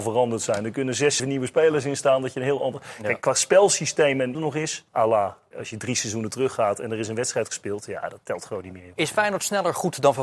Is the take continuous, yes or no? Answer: no